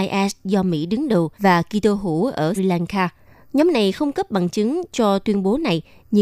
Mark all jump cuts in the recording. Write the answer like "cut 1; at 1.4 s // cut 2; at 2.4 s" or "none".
cut 1; at 1.4 s // cut 2; at 2.6 s // cut 3; at 3.2 s // cut 4; at 4.1 s